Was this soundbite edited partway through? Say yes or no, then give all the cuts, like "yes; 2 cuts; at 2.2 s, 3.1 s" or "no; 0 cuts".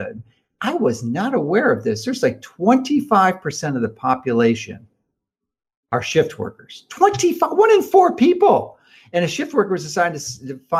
no; 0 cuts